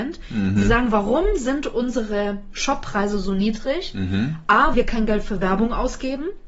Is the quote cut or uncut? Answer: cut